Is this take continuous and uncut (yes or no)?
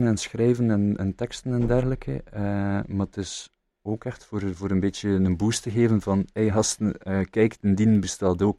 yes